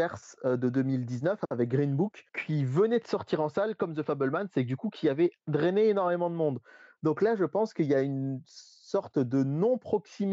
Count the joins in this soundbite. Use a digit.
0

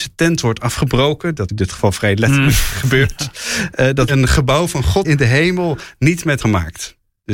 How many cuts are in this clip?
4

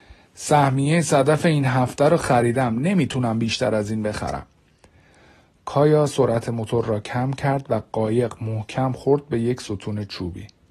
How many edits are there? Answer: 0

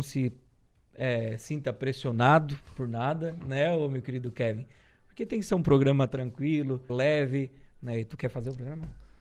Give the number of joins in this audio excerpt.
1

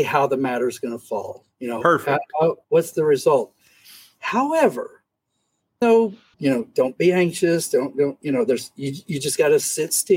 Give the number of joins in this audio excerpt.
3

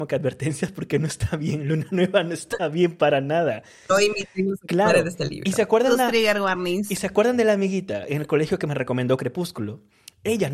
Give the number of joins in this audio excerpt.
0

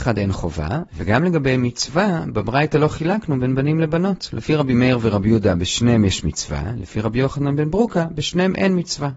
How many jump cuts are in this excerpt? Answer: 0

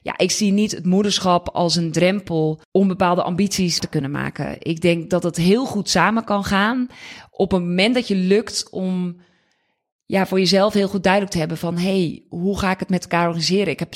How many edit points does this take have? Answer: 2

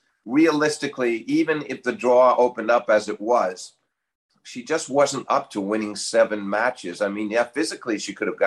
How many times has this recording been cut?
0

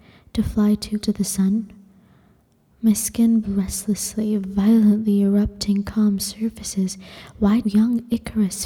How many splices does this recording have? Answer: 3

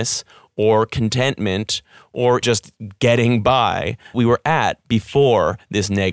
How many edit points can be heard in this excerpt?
2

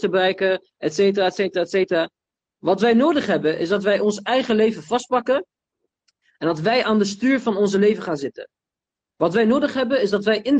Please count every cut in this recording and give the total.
0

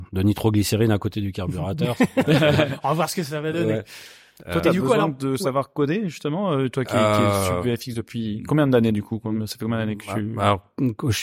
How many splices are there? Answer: 0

